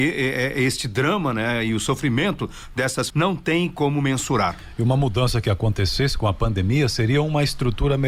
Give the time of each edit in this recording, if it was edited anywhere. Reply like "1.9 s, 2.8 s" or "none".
3.1 s, 5.4 s